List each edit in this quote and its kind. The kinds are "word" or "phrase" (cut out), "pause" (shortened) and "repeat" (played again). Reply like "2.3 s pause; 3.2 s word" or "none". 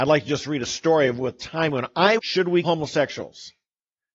2.2 s phrase; 2.6 s word